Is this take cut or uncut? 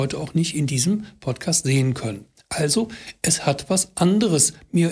uncut